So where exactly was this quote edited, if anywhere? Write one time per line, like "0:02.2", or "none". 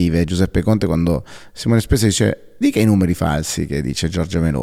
0:02.6